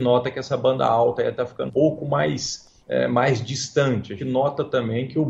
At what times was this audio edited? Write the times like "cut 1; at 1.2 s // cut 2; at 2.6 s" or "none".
cut 1; at 1.7 s // cut 2; at 2.8 s // cut 3; at 4.2 s